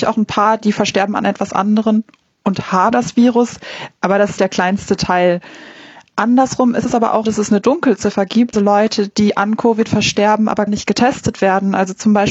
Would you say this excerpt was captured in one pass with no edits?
no; 5 cuts; at 2.9 s, 4.4 s, 7.2 s, 8.5 s, 10.7 s

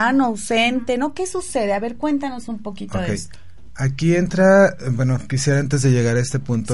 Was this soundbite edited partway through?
no; 0 cuts

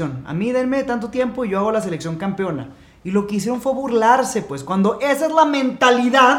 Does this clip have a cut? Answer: no; 0 cuts

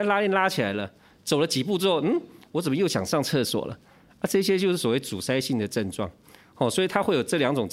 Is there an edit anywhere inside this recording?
no; 0 cuts

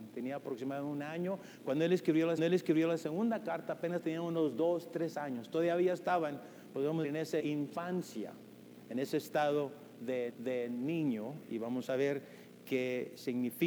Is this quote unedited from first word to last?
no; 4 cuts; at 2.4 s, 7.0 s, 7.4 s, 10.3 s

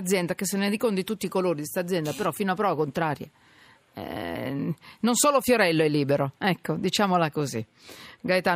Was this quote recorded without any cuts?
yes; 0 cuts

